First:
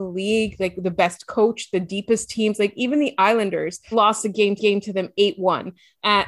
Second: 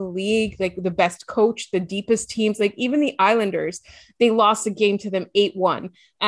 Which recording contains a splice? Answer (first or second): first